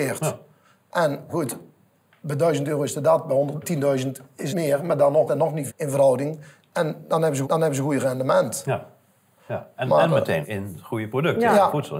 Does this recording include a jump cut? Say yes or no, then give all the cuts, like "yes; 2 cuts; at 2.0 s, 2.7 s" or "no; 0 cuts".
yes; 7 cuts; at 1.3 s, 3.6 s, 4.5 s, 5.3 s, 5.7 s, 7.4 s, 10.4 s